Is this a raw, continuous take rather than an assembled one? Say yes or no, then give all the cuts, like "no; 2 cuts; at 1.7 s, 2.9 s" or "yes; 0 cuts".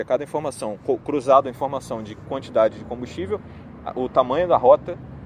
yes; 0 cuts